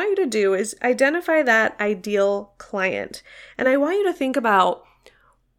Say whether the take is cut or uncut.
uncut